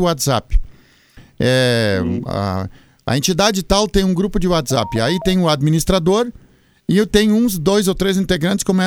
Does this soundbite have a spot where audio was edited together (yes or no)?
no